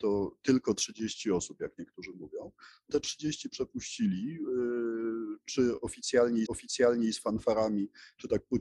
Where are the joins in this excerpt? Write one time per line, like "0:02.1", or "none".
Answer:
0:02.9
0:06.5